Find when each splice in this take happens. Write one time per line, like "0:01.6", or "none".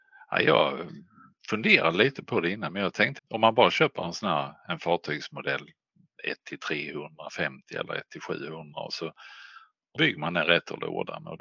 0:03.2
0:10.0